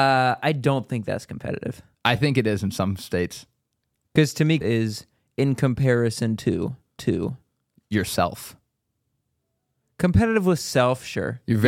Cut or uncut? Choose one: cut